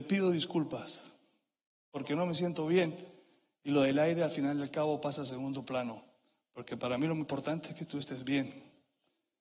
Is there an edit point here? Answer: no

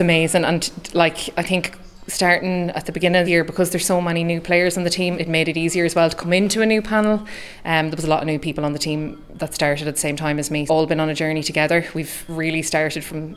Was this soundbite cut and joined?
yes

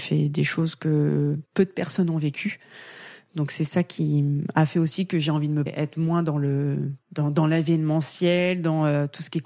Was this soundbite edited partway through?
yes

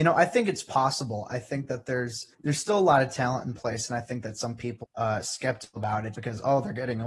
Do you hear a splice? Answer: yes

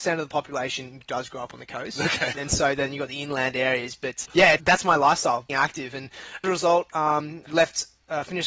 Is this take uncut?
no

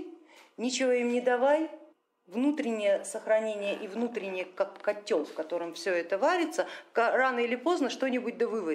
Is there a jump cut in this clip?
yes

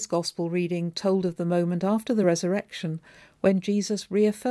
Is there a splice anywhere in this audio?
no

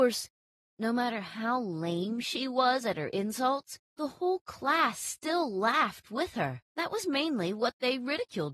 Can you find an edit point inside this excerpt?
yes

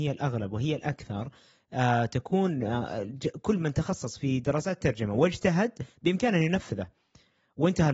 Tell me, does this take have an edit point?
no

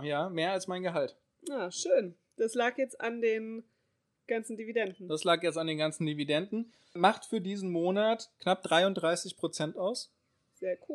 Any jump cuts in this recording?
no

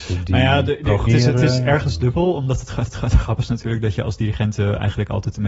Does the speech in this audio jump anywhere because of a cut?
yes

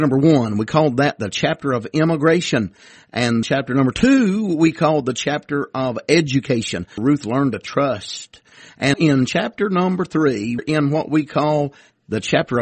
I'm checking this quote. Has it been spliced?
yes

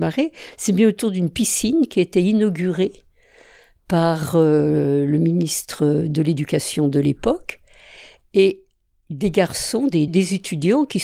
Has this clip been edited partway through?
yes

